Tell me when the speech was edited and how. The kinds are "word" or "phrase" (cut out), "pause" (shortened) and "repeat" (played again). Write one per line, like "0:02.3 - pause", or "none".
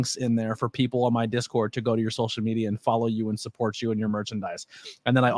none